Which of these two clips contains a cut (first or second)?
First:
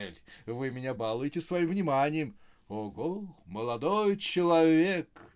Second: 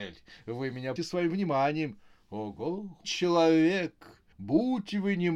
second